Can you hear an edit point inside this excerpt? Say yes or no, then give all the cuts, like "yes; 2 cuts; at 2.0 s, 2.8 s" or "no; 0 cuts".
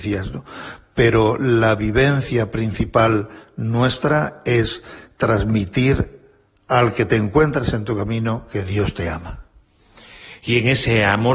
no; 0 cuts